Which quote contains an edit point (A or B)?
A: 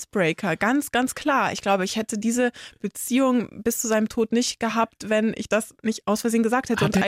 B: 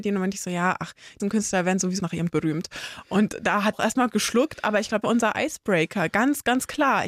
B